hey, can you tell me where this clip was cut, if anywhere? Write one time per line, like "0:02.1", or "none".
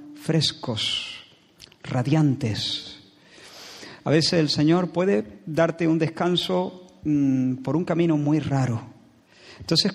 none